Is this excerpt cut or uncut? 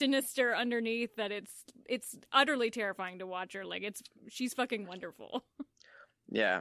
uncut